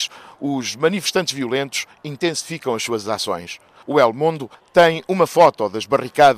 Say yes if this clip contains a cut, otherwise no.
no